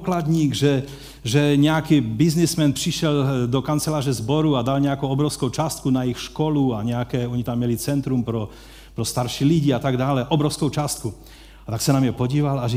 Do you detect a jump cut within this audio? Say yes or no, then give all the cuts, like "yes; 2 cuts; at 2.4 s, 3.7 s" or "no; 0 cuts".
no; 0 cuts